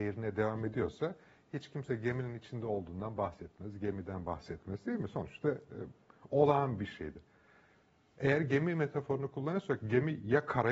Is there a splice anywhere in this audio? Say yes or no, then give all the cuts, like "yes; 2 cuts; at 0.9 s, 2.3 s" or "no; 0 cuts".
no; 0 cuts